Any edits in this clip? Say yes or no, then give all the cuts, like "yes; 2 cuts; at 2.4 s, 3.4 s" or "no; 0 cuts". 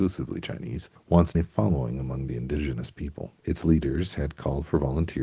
yes; 3 cuts; at 1.0 s, 1.3 s, 3.4 s